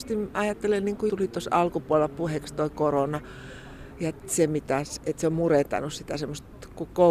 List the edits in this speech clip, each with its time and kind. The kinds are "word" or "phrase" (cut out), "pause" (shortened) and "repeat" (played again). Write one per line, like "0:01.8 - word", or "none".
0:01.1 - word